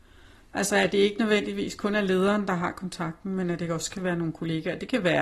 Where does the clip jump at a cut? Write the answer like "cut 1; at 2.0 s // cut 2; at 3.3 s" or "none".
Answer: none